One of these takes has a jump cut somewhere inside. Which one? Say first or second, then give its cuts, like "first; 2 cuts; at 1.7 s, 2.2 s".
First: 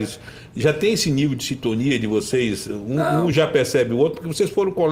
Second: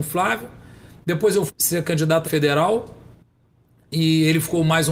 second; 2 cuts; at 1.5 s, 2.2 s